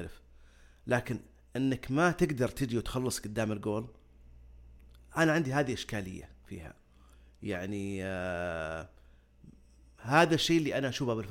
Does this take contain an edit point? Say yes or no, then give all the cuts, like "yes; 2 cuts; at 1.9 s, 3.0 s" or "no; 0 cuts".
no; 0 cuts